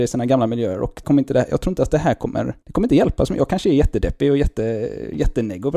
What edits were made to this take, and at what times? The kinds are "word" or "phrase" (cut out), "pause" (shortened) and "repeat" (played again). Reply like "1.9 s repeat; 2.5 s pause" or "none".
1.0 s word; 2.6 s pause